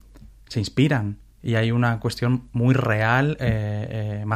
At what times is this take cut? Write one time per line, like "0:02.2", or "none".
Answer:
none